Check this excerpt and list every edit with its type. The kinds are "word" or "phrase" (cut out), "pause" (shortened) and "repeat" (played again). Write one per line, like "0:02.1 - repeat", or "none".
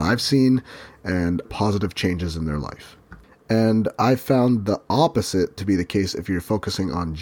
0:01.4 - word